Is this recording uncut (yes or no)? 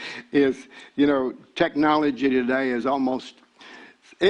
yes